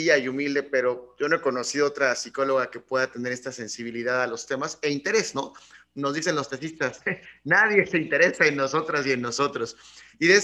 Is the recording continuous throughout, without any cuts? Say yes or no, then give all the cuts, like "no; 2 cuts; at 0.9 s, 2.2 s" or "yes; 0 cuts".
yes; 0 cuts